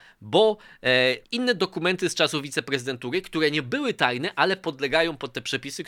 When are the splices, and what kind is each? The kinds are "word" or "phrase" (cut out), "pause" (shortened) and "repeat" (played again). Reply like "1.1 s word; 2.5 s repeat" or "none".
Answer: 1.2 s pause